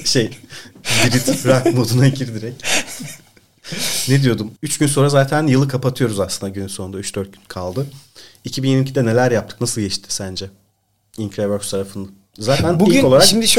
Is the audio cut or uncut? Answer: uncut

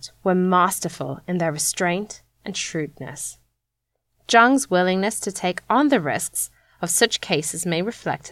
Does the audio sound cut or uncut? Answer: uncut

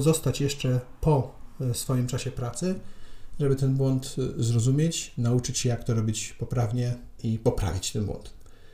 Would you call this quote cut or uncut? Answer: uncut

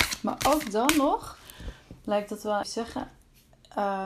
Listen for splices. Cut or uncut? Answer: cut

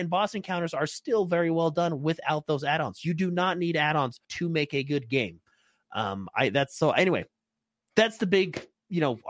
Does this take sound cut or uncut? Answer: cut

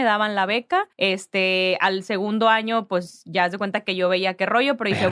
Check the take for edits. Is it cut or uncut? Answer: cut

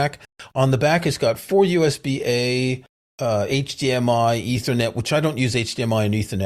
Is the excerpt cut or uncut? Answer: uncut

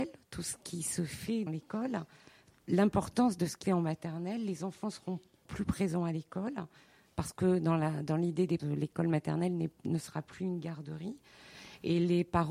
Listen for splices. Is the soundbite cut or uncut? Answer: cut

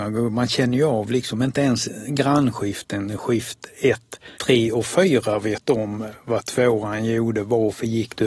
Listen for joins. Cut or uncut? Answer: cut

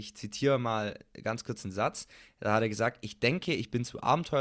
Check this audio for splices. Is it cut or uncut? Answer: uncut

